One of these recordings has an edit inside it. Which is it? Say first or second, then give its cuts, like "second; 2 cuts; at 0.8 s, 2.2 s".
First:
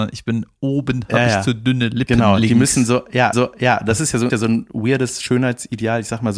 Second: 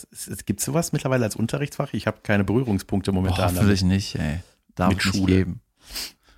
first; 2 cuts; at 3.3 s, 4.3 s